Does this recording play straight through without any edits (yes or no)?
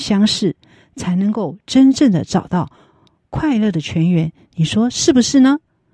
yes